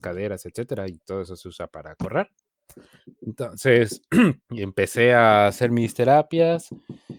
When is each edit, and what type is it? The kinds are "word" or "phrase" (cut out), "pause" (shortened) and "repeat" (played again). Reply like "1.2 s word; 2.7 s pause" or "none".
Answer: 4.4 s pause